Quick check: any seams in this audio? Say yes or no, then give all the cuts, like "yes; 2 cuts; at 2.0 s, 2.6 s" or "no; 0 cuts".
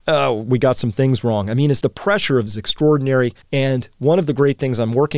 yes; 3 cuts; at 1.8 s, 2.5 s, 3.4 s